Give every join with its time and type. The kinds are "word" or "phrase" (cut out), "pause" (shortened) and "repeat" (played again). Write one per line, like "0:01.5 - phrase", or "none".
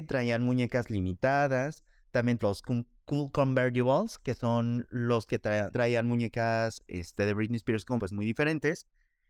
0:02.4 - word
0:05.3 - word
0:05.7 - word
0:08.0 - word